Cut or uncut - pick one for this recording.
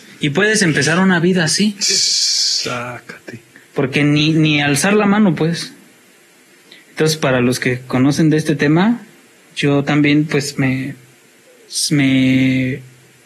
uncut